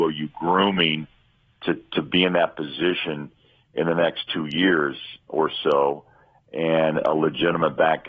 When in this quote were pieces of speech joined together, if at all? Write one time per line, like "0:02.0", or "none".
none